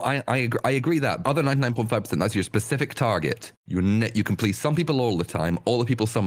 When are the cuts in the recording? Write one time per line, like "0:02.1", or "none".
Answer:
0:01.2
0:03.5